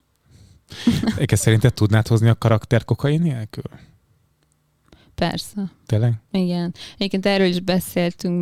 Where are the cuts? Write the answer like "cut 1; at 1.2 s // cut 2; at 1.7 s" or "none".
none

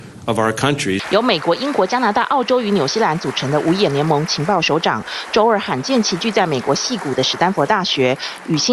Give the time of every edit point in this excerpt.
none

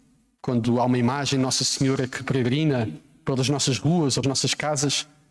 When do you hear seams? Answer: cut 1; at 4.2 s

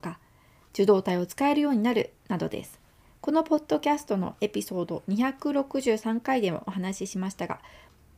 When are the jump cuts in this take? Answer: cut 1; at 2.2 s

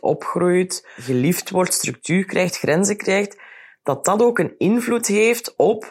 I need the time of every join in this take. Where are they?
none

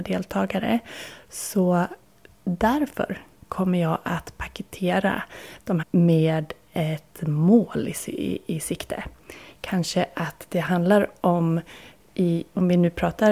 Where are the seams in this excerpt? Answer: cut 1; at 5.8 s

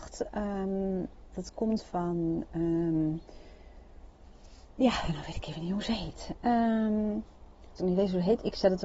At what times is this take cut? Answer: cut 1; at 7.8 s

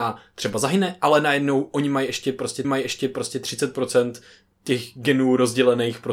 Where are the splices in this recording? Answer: cut 1; at 2.6 s

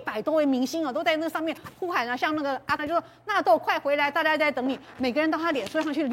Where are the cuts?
cut 1; at 2.8 s

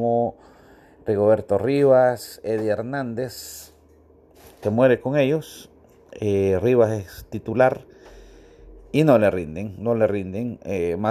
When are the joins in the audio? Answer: cut 1; at 4.6 s

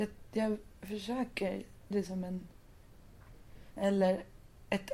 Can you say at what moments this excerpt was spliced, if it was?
cut 1; at 1.9 s // cut 2; at 3.8 s

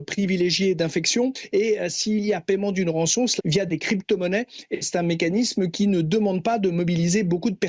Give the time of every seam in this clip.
cut 1; at 3.4 s // cut 2; at 4.8 s

